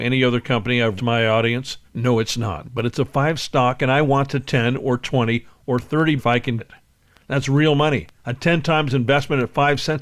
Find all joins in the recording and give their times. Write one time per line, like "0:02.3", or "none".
0:01.0
0:01.9
0:03.4
0:06.2
0:06.6
0:08.2